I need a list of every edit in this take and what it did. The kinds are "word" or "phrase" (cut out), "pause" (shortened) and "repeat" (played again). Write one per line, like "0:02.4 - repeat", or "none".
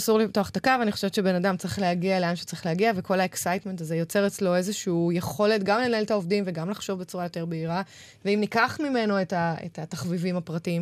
none